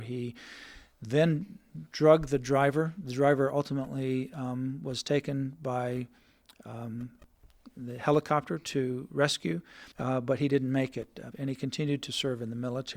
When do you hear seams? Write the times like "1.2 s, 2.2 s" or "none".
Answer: 9.9 s, 11.3 s